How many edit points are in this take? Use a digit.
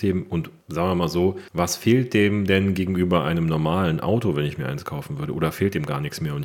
1